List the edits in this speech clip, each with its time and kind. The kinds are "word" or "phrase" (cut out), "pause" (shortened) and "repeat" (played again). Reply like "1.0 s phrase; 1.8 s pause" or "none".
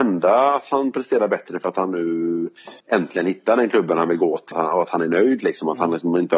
2.8 s pause; 4.5 s word